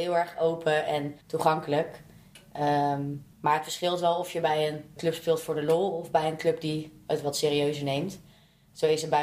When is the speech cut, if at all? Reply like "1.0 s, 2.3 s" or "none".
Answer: 1.2 s, 3.3 s, 5.0 s